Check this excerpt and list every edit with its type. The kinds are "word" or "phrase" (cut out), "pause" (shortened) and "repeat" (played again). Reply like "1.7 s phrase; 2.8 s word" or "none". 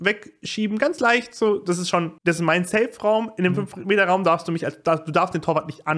2.2 s pause